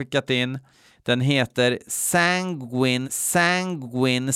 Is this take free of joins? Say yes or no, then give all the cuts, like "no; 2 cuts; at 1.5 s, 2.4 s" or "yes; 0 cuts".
no; 1 cut; at 3.0 s